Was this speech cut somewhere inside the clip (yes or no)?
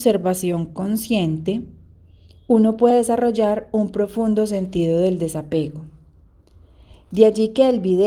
no